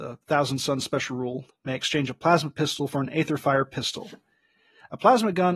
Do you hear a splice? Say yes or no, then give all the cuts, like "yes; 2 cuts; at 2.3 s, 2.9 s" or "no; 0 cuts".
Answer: no; 0 cuts